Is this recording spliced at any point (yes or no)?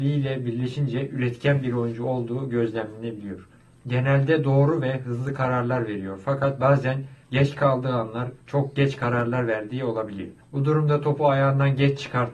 yes